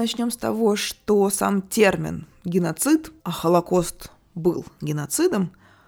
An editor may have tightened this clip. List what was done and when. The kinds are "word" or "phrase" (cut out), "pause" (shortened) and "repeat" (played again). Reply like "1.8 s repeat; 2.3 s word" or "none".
3.2 s pause